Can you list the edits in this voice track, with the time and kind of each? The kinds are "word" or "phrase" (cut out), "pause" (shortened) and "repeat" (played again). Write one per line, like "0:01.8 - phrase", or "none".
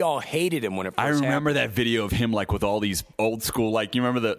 0:03.1 - pause

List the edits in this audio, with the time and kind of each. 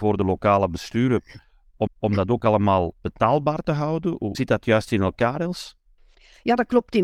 0:01.9 - repeat
0:03.0 - pause
0:04.3 - word

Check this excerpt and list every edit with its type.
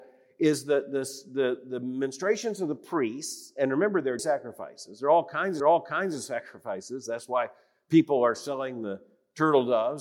0:04.2 - word
0:05.6 - repeat

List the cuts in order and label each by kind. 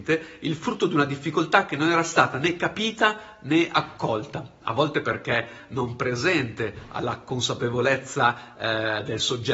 none

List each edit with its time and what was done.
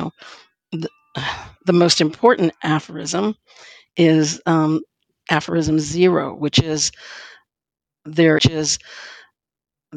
0:08.4 - repeat

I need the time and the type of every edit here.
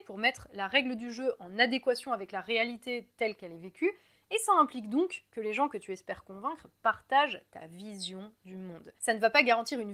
none

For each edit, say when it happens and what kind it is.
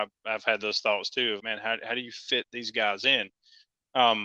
0:01.4 - word

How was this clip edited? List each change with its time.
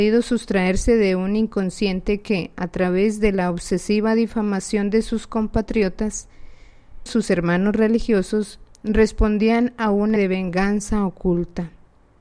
0:07.1 - word
0:10.2 - word

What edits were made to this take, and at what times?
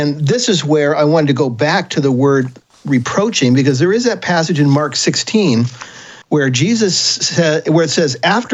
0:06.2 - pause

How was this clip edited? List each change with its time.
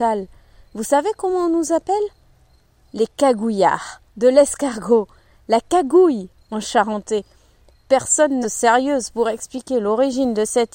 0:04.1 - pause
0:08.4 - phrase

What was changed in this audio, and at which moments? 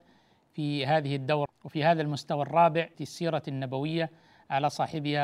0:01.5 - word
0:02.9 - phrase

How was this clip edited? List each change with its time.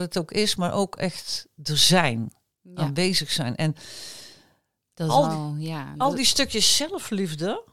none

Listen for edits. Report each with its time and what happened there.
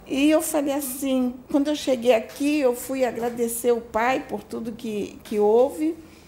0:01.5 - pause

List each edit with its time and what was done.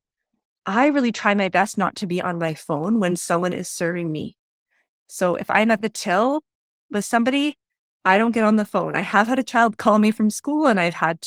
none

